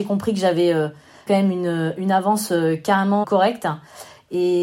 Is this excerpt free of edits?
no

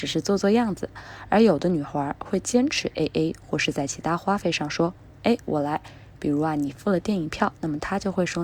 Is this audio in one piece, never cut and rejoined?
yes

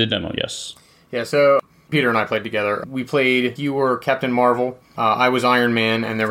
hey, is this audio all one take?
no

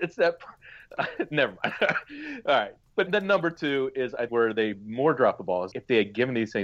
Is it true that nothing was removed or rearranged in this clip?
no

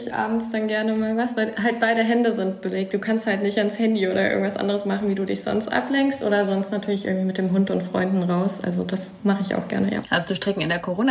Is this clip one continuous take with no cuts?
yes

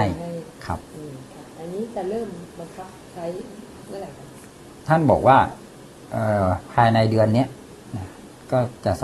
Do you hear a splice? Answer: no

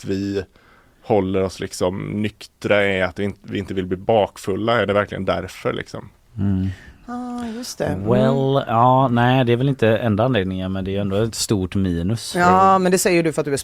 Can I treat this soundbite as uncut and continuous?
yes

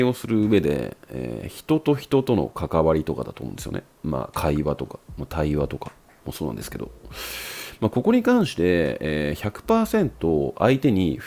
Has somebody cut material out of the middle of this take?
no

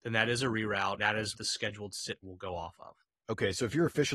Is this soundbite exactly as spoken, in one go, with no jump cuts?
no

